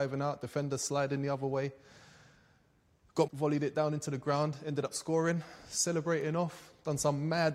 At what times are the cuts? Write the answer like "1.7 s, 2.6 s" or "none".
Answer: 3.3 s